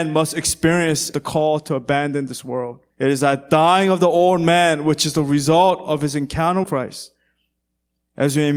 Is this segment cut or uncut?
cut